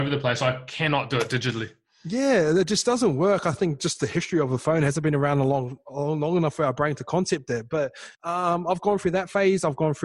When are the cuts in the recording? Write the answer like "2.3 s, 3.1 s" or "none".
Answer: 8.1 s